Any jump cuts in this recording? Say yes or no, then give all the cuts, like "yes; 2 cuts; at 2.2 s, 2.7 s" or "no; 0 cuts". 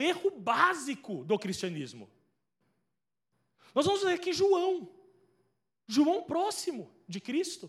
no; 0 cuts